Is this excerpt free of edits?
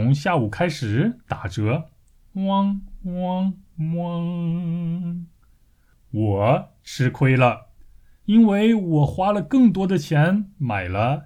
yes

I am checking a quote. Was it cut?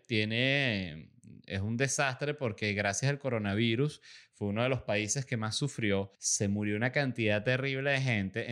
yes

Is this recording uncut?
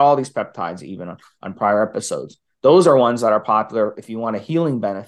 yes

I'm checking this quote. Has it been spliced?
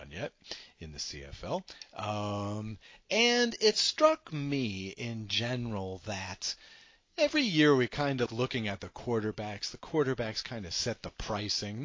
yes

